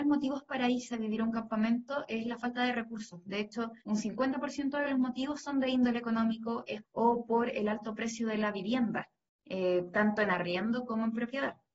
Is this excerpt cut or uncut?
cut